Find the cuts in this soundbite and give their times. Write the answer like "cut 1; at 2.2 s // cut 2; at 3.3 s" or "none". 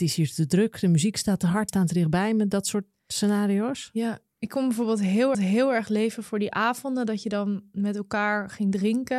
cut 1; at 1.7 s // cut 2; at 5.3 s